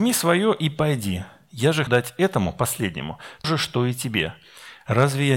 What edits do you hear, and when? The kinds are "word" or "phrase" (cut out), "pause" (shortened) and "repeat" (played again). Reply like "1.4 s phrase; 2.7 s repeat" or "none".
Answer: 1.9 s word; 3.4 s word